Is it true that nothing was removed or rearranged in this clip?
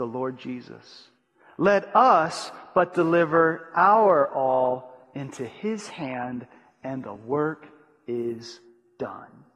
yes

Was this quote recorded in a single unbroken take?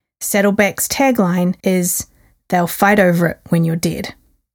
no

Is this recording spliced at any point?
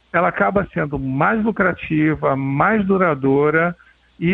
no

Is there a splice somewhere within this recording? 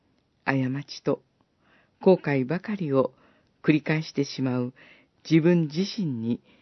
no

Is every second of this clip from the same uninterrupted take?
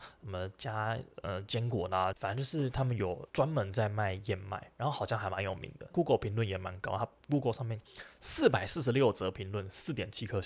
no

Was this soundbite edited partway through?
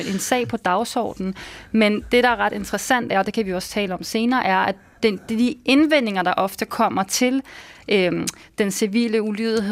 no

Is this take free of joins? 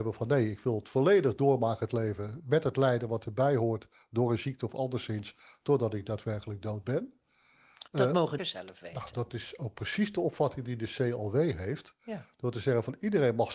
no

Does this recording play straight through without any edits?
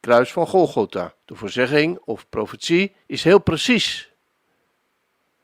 no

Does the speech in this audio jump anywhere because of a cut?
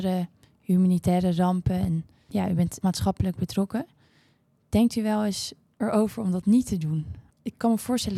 yes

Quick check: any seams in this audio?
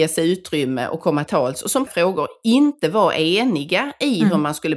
yes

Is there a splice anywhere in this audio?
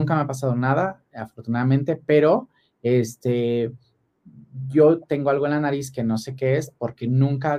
no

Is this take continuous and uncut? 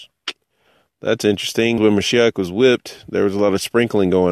no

